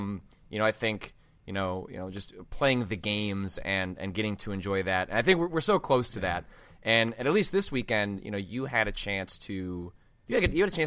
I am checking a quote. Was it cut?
no; 0 cuts

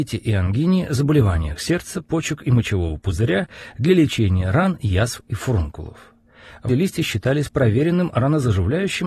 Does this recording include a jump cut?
yes; 1 cut; at 6.7 s

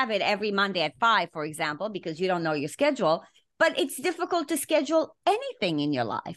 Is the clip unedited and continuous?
yes; 0 cuts

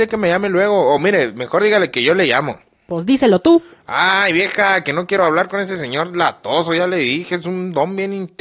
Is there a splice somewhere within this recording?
no; 0 cuts

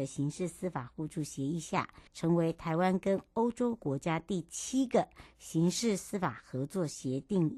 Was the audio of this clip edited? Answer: yes; 1 cut; at 2.1 s

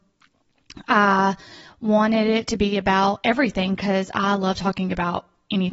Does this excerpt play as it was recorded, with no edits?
yes; 0 cuts

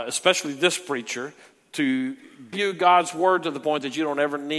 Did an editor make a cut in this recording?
yes; 1 cut; at 2.5 s

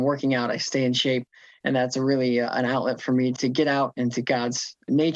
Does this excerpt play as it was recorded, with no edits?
yes; 0 cuts

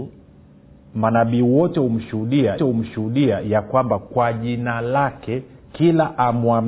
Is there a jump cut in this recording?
yes; 1 cut; at 2.6 s

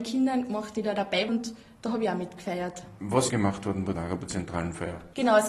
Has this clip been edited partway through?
yes; 4 cuts; at 1.3 s, 3.3 s, 3.9 s, 4.3 s

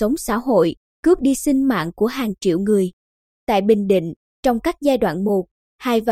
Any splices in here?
no; 0 cuts

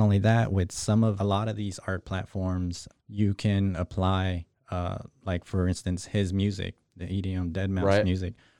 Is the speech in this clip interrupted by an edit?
yes; 2 cuts; at 1.2 s, 2.9 s

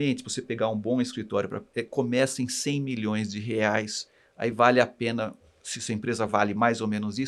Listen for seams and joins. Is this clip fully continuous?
yes; 0 cuts

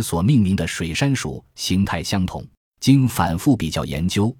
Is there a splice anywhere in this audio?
yes; 1 cut; at 2.6 s

